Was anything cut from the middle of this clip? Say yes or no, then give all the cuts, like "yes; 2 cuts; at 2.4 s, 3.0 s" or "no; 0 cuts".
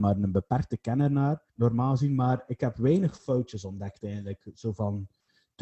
yes; 1 cut; at 1.5 s